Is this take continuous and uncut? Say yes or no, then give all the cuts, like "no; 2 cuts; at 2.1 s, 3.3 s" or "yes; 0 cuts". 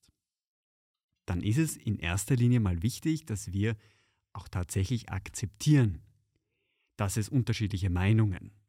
yes; 0 cuts